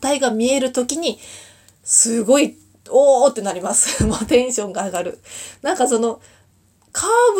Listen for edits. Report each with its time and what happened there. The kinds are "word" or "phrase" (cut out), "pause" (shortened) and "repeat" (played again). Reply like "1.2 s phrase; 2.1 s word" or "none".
none